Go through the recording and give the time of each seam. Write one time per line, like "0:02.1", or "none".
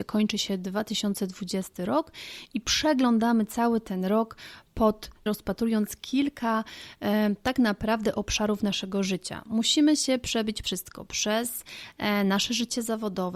0:05.3
0:10.6